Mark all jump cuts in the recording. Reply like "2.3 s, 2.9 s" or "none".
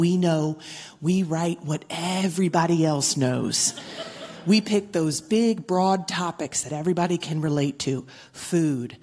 none